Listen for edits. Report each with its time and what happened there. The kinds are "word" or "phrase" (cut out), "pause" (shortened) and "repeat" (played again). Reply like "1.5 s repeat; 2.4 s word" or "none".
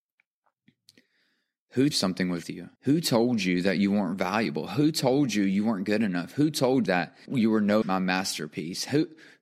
1.9 s phrase; 2.4 s phrase; 2.8 s pause; 6.9 s word; 7.3 s word; 7.8 s word